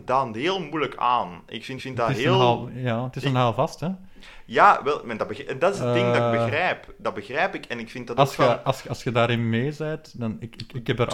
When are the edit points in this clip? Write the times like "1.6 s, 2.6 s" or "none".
1.8 s

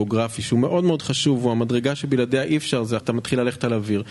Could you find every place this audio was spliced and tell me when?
3.0 s

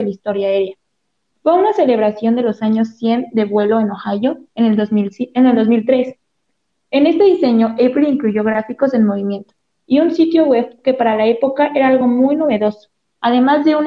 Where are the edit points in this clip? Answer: none

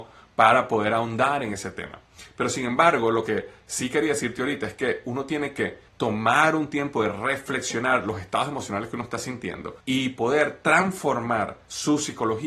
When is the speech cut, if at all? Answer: 5.9 s, 9.8 s

